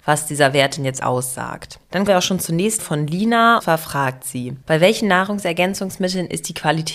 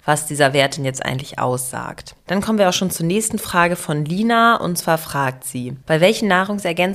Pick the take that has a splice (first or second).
first